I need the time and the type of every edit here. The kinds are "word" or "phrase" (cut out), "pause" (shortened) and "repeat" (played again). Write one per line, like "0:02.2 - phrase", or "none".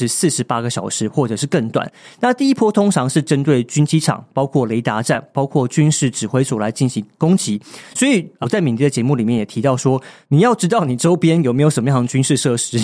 0:08.4 - word